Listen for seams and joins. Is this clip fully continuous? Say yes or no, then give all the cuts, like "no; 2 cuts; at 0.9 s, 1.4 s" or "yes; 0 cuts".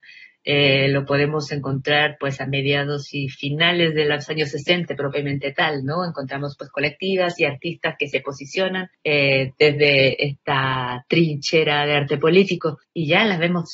yes; 0 cuts